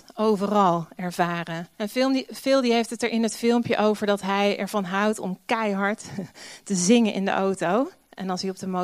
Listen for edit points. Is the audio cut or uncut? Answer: cut